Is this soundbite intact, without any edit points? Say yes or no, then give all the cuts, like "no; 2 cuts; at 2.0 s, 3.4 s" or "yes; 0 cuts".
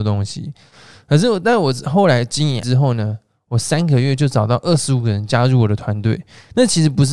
no; 1 cut; at 2.6 s